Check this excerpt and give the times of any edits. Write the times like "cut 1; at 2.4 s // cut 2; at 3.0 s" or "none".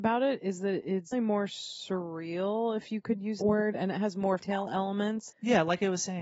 cut 1; at 1.1 s // cut 2; at 3.4 s // cut 3; at 4.4 s // cut 4; at 5.3 s